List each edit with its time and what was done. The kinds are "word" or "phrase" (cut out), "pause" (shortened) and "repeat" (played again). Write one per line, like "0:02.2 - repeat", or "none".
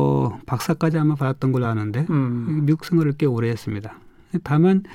none